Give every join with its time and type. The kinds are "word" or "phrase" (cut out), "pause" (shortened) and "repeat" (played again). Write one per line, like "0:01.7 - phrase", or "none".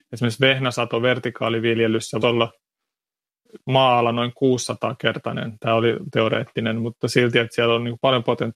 0:02.2 - word
0:03.6 - word
0:06.1 - word